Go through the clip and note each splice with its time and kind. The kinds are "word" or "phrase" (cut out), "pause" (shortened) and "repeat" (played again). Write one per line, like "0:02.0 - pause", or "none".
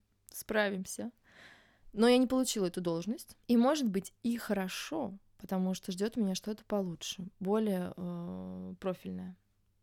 0:03.4 - pause